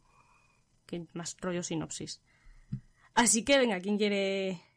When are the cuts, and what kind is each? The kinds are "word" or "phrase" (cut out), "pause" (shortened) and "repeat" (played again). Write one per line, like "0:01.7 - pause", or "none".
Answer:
none